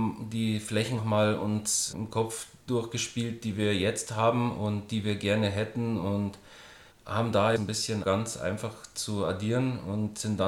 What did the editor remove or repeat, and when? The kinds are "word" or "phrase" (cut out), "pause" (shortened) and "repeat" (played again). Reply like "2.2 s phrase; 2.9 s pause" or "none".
1.0 s word; 1.9 s word; 6.9 s pause; 7.6 s phrase; 8.0 s word